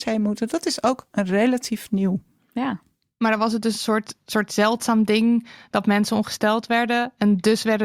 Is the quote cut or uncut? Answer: uncut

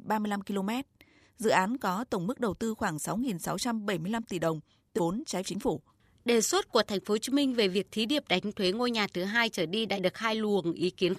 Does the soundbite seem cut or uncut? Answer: cut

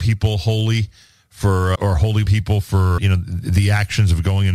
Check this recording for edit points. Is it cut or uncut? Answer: cut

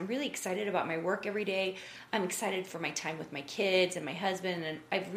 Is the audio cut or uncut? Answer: uncut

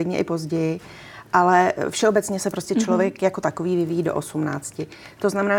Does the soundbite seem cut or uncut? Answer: uncut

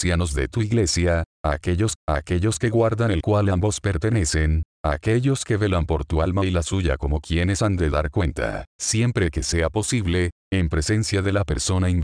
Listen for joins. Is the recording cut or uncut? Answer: cut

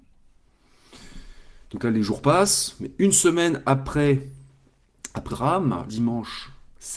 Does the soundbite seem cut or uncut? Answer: cut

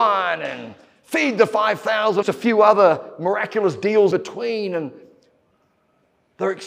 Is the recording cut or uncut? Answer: cut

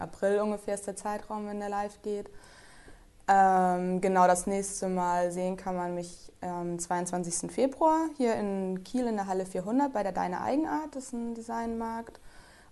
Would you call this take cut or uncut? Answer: uncut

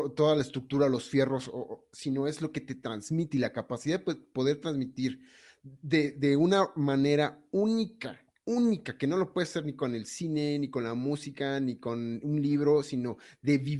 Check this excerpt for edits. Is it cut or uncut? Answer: uncut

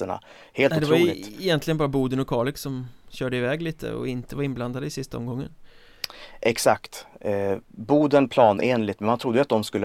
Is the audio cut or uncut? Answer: uncut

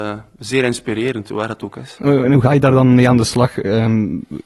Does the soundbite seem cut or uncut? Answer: uncut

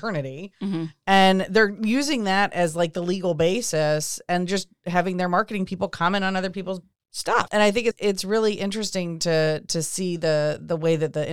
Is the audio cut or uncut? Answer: cut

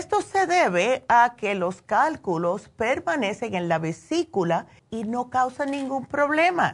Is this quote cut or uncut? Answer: cut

